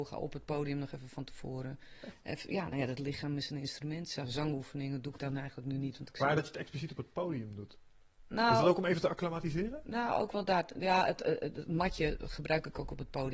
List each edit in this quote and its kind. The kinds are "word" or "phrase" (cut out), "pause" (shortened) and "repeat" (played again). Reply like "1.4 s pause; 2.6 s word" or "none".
none